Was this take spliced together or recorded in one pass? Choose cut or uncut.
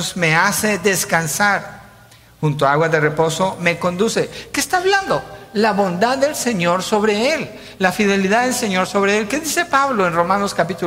uncut